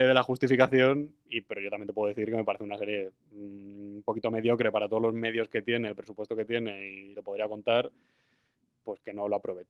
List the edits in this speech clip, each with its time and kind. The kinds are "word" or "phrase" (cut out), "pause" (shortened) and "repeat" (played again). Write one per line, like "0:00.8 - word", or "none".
0:03.2 - pause
0:07.1 - phrase